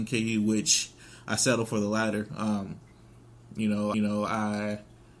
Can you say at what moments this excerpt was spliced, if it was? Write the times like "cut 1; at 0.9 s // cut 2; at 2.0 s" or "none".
cut 1; at 3.9 s